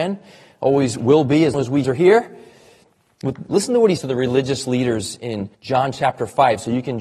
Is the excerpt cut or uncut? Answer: cut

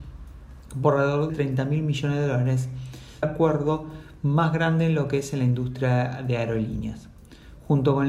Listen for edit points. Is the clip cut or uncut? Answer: cut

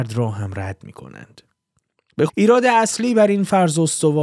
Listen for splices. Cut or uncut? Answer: cut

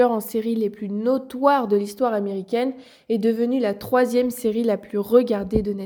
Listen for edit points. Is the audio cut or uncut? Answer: uncut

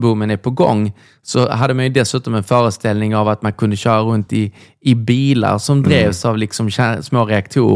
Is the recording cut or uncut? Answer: uncut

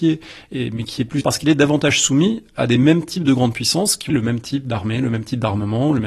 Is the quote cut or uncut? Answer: cut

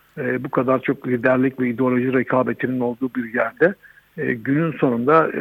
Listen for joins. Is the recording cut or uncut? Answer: uncut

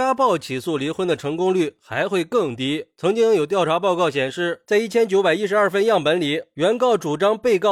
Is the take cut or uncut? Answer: uncut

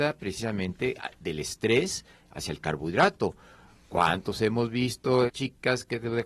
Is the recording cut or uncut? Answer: cut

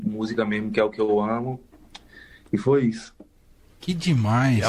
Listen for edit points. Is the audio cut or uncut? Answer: uncut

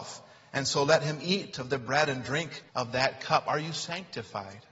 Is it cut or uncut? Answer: cut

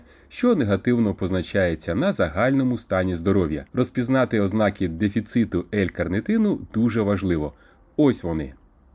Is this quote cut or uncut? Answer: cut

